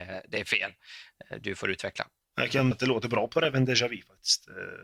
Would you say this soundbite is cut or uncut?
cut